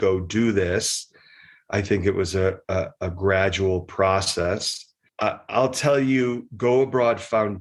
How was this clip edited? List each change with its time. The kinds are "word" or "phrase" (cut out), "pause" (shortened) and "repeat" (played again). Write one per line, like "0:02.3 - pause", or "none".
none